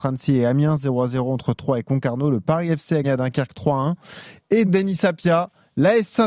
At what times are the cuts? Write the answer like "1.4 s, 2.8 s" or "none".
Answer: 3.0 s, 4.6 s